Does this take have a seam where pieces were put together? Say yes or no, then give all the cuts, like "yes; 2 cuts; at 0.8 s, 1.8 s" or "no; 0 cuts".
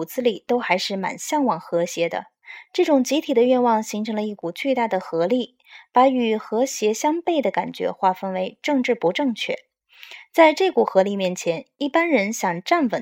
no; 0 cuts